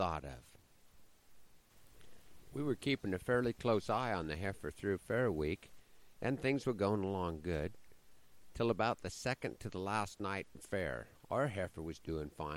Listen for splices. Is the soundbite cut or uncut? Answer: uncut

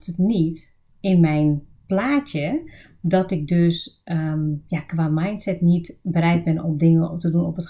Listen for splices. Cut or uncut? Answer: uncut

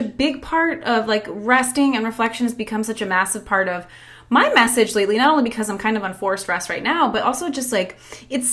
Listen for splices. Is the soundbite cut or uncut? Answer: uncut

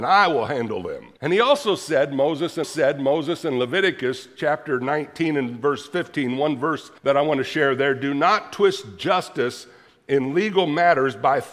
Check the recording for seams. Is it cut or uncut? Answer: cut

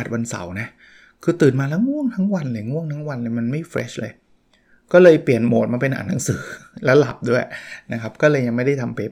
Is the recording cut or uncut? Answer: uncut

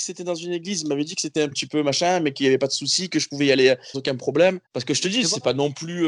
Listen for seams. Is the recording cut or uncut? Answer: cut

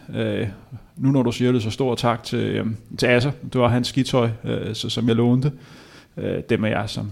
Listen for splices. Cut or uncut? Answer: uncut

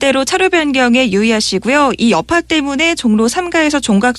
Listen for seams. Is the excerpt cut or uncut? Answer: uncut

